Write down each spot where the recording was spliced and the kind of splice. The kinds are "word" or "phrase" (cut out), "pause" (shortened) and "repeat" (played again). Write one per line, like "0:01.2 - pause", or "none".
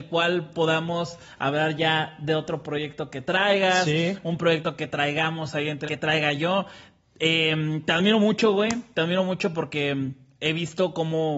0:05.9 - word